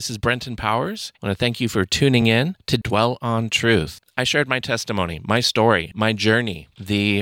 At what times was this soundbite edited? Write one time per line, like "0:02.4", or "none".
none